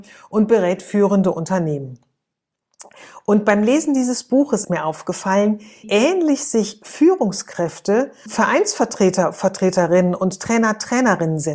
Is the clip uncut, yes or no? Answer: no